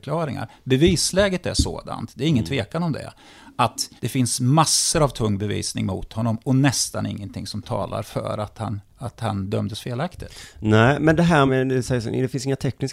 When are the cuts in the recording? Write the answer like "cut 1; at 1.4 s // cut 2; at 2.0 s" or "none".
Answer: cut 1; at 4.0 s // cut 2; at 11.5 s